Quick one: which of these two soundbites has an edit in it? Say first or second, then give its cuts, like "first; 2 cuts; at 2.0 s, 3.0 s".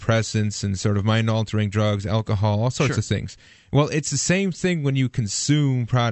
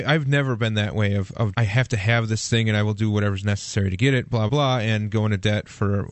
second; 2 cuts; at 1.5 s, 4.5 s